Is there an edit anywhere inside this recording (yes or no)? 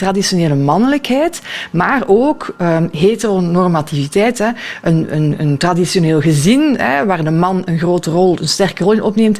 no